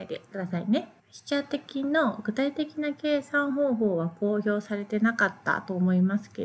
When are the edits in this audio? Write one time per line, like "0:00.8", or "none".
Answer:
0:01.0